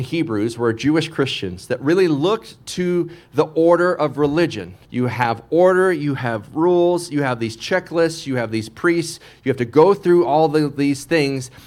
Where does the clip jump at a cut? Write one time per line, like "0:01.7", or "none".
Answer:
0:04.9